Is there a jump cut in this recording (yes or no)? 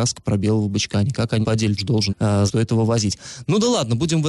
yes